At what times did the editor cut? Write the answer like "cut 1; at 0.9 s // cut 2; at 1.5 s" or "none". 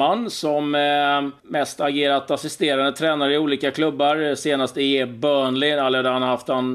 cut 1; at 1.4 s